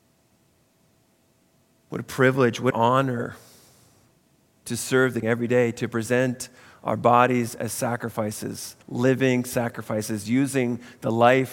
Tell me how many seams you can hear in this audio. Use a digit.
3